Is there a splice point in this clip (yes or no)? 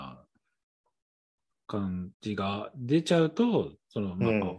yes